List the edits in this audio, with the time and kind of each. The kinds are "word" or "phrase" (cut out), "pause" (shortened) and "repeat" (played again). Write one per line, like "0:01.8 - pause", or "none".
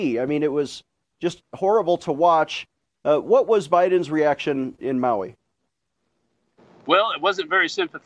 0:04.8 - word